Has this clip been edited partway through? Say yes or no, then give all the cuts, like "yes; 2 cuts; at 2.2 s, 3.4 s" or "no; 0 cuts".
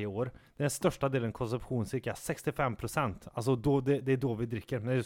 no; 0 cuts